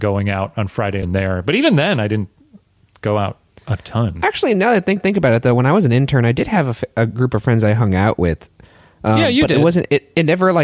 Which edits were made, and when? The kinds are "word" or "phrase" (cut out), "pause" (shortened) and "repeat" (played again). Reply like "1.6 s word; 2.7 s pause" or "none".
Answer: 1.0 s phrase; 5.0 s repeat